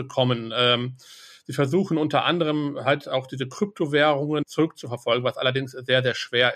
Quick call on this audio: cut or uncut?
uncut